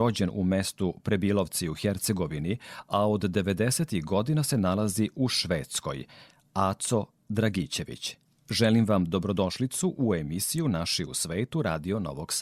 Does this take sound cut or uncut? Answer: cut